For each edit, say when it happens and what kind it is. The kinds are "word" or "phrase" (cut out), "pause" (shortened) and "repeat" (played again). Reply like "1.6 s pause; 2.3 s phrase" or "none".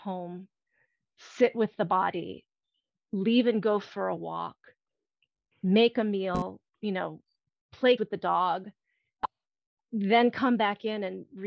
8.0 s word